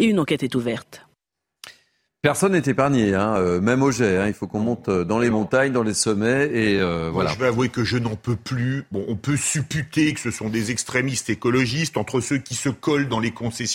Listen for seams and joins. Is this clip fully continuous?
yes; 0 cuts

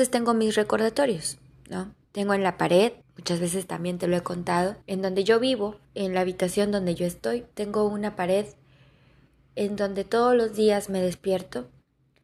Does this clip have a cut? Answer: yes; 5 cuts; at 2.0 s, 3.0 s, 4.8 s, 5.8 s, 7.5 s

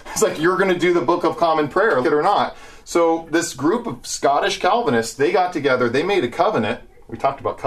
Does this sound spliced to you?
yes; 1 cut; at 2.0 s

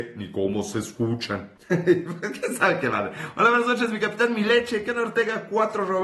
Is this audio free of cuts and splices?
no; 1 cut; at 1.6 s

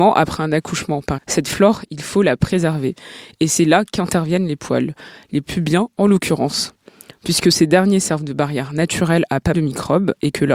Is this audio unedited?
no; 3 cuts; at 1.2 s, 5.4 s, 9.5 s

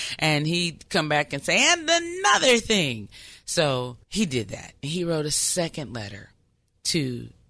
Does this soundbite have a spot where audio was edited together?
yes; 1 cut; at 4.0 s

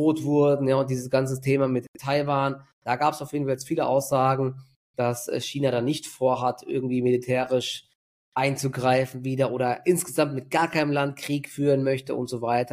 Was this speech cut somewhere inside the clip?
no; 0 cuts

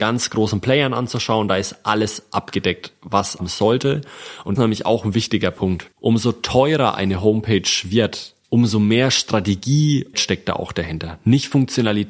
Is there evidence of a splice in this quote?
yes; 5 cuts; at 3.4 s, 4.5 s, 5.9 s, 8.4 s, 10.1 s

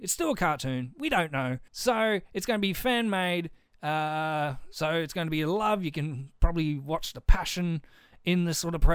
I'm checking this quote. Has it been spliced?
yes; 1 cut; at 1.7 s

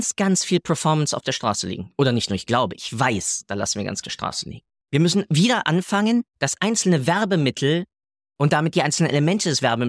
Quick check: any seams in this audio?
yes; 4 cuts; at 4.0 s, 4.8 s, 6.3 s, 8.0 s

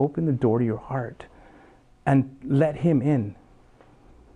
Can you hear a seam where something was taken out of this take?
no; 0 cuts

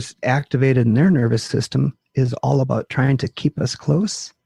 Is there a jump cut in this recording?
no; 0 cuts

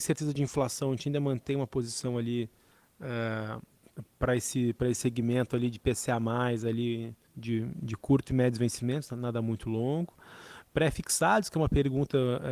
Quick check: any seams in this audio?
yes; 1 cut; at 7.3 s

